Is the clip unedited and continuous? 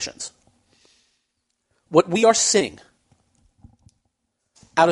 yes; 0 cuts

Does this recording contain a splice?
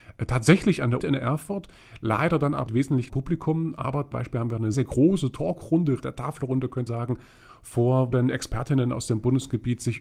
yes; 8 cuts; at 1.0 s, 2.7 s, 3.1 s, 4.1 s, 4.7 s, 6.0 s, 6.9 s, 8.1 s

